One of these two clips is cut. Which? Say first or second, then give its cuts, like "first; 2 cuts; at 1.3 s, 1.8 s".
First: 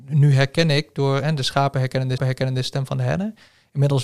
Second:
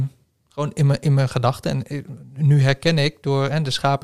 first; 1 cut; at 2.2 s